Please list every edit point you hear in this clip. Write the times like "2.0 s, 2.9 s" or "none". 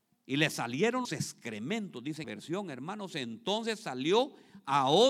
1.0 s, 2.2 s